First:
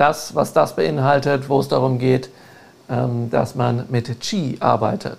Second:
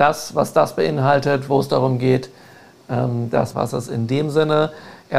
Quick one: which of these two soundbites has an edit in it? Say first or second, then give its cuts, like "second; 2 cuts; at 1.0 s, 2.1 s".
second; 1 cut; at 3.5 s